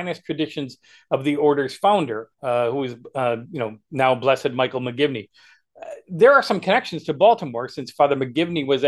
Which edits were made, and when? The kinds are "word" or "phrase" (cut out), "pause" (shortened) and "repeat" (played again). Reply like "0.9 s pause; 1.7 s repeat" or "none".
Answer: 2.3 s pause